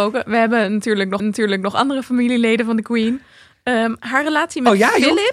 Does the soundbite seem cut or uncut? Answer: cut